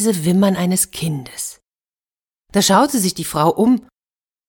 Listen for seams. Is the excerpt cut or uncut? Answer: uncut